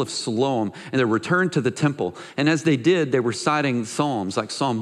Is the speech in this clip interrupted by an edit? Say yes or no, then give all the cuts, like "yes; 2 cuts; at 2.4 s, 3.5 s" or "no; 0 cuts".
yes; 1 cut; at 1.0 s